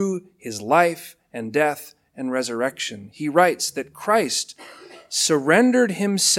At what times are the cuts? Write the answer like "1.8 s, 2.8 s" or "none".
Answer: none